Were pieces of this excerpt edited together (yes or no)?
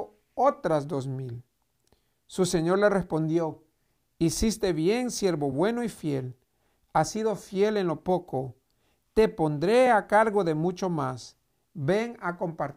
no